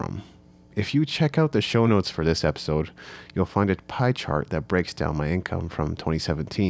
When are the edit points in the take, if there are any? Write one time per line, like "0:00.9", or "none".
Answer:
none